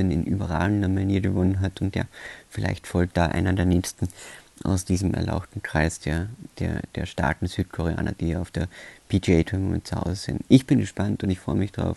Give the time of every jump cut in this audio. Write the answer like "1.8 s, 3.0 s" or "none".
none